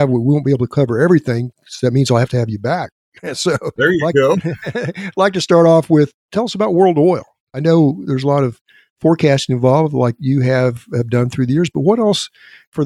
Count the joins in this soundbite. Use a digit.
0